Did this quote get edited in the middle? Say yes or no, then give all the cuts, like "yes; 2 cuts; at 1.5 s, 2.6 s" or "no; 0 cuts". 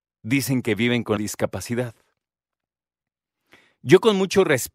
yes; 1 cut; at 1.2 s